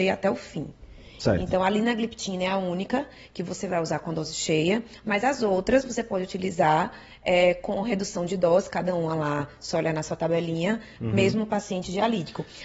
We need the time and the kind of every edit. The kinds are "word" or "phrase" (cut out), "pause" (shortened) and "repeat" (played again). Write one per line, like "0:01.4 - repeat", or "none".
none